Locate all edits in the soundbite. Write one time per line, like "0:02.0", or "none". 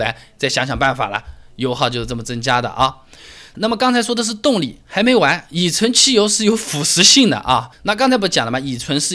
0:07.7